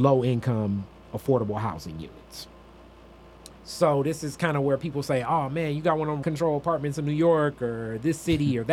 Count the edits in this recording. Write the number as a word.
two